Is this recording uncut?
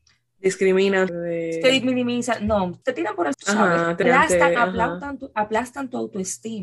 no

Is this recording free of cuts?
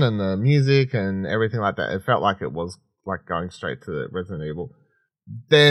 yes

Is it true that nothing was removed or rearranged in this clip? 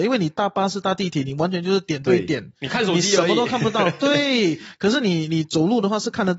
yes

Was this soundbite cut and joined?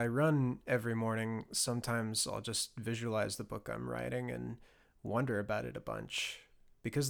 no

